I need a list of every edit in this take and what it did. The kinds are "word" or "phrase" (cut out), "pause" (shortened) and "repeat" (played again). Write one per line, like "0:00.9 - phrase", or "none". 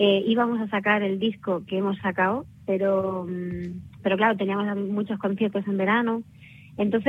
none